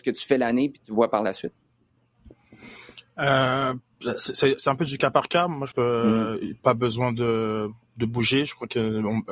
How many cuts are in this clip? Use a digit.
2